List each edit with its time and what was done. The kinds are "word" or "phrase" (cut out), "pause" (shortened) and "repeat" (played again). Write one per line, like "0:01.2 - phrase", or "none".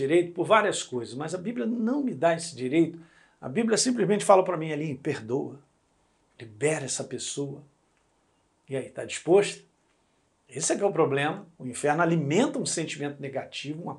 none

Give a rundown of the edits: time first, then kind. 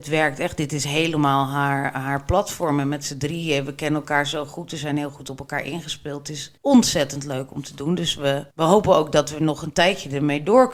0:06.6 - pause
0:08.5 - pause

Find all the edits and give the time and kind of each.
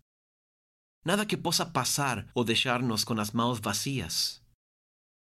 0:02.3 - pause

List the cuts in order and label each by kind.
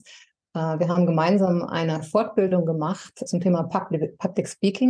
0:03.3 - word

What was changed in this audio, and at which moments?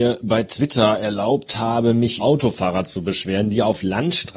0:02.2 - word

